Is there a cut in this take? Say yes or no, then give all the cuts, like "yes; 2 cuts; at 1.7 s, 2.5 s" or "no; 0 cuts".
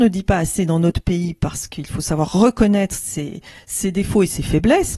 no; 0 cuts